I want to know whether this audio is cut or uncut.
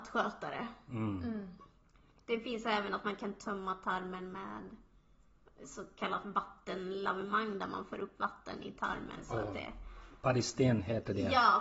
uncut